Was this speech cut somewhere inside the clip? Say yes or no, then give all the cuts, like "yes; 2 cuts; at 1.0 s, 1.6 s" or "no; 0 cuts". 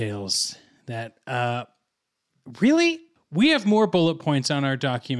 no; 0 cuts